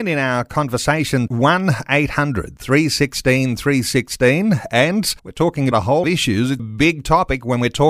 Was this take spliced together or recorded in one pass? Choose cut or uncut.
cut